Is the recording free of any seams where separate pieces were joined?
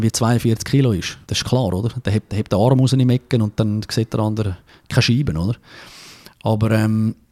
no; 2 cuts; at 1.2 s, 2.3 s

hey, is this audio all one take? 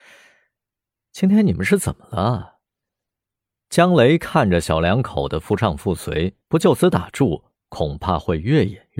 no; 2 cuts; at 2.7 s, 6.4 s

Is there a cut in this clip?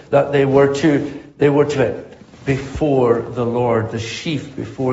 yes; 1 cut; at 1.8 s

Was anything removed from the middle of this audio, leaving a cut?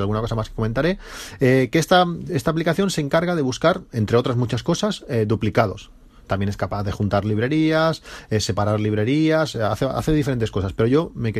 no; 0 cuts

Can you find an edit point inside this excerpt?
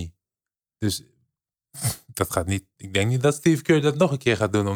no; 0 cuts

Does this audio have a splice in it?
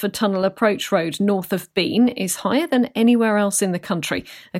no; 0 cuts

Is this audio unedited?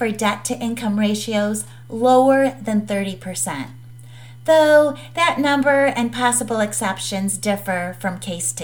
yes; 0 cuts

